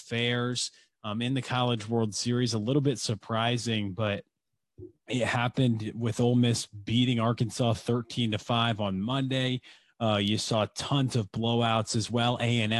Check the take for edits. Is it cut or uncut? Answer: uncut